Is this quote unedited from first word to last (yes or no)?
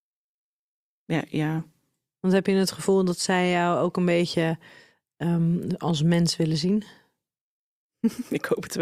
yes